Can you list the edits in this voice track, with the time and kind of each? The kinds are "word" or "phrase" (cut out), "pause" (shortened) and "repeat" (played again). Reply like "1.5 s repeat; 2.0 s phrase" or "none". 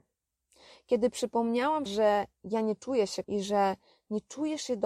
1.9 s word; 3.2 s word